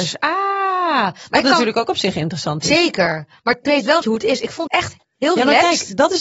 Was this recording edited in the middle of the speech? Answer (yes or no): yes